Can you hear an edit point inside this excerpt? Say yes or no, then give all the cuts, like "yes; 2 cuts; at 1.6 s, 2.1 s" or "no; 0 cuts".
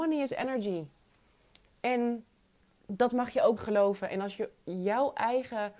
yes; 2 cuts; at 2.8 s, 3.6 s